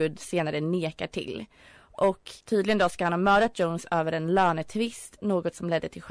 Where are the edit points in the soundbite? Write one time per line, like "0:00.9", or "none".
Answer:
0:02.4